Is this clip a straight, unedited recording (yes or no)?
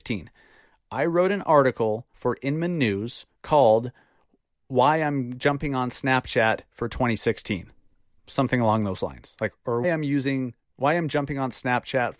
no